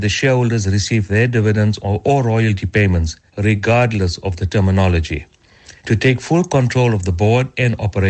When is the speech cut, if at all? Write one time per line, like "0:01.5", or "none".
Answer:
0:03.3
0:05.8

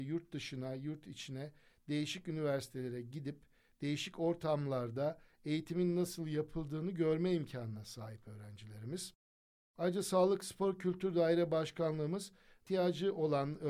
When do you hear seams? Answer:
none

